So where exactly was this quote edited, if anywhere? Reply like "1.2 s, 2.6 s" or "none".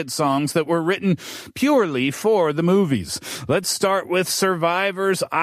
none